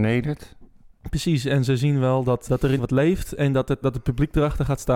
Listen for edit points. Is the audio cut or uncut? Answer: cut